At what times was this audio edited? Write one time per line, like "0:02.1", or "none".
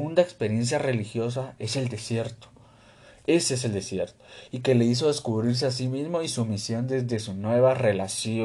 none